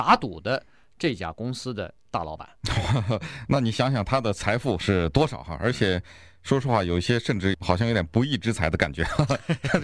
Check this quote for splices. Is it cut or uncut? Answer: cut